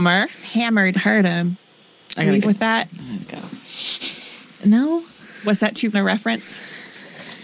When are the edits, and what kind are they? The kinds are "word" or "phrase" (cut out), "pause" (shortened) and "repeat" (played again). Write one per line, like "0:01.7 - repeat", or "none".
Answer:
0:00.9 - word
0:02.4 - word
0:05.9 - word